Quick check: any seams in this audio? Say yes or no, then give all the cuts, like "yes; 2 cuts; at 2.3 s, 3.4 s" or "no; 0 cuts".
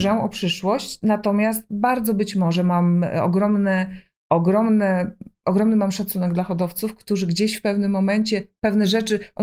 no; 0 cuts